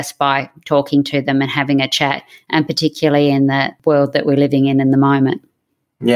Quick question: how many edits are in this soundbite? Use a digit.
0